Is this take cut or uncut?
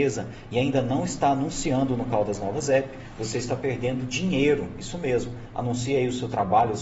uncut